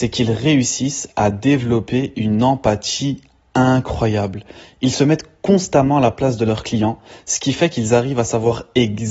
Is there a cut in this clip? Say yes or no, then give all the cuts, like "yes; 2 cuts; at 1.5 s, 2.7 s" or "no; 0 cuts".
no; 0 cuts